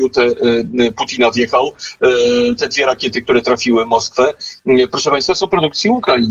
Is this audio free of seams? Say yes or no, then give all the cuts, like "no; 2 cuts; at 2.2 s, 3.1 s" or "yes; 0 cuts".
yes; 0 cuts